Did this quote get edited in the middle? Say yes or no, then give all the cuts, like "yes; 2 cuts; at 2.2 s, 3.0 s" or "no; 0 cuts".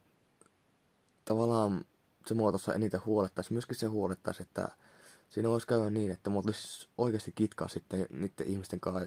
no; 0 cuts